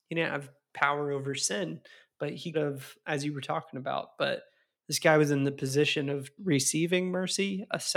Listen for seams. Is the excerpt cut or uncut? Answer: cut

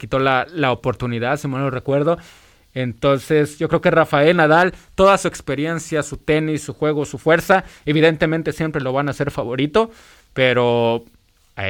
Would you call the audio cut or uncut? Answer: uncut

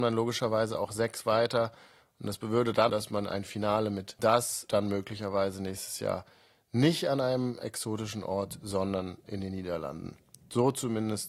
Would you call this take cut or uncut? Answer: cut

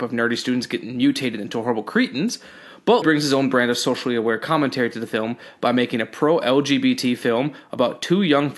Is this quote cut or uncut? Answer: cut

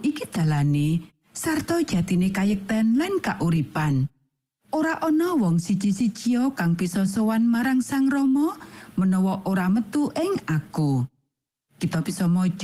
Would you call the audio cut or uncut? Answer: uncut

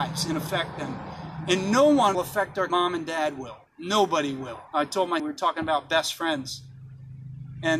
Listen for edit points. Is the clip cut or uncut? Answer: cut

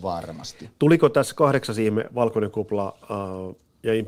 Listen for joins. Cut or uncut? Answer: uncut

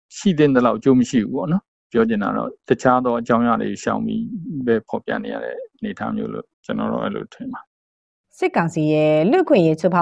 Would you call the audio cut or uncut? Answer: cut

